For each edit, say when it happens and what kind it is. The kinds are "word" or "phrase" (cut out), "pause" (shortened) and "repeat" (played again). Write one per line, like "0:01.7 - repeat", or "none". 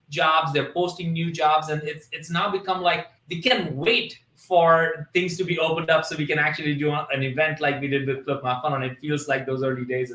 0:03.2 - pause